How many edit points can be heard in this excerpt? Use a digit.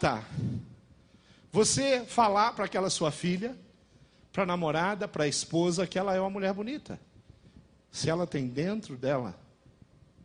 0